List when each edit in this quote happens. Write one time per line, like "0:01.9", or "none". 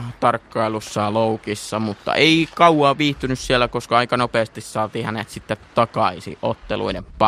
none